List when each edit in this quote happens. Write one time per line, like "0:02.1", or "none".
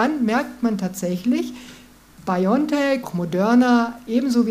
0:03.0